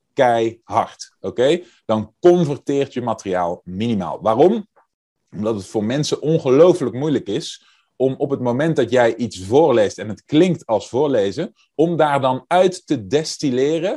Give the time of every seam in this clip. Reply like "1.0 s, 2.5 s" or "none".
none